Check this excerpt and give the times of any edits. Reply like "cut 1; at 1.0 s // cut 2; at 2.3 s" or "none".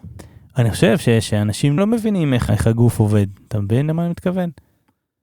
cut 1; at 1.8 s // cut 2; at 2.5 s